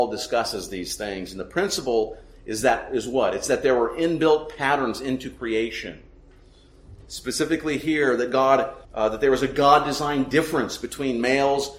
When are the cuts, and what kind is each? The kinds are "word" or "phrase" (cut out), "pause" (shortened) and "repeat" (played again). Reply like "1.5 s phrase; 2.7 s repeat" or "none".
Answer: 8.8 s pause